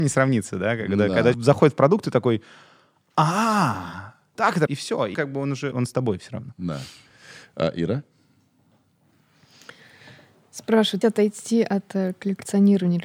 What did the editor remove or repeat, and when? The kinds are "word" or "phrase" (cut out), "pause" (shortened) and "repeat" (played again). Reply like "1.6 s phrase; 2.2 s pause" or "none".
1.3 s word; 4.3 s word; 4.7 s word; 5.1 s word; 5.7 s word; 11.0 s word